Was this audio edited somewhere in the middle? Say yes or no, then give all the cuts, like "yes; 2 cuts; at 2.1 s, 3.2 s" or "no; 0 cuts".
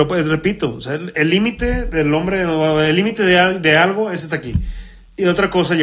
no; 0 cuts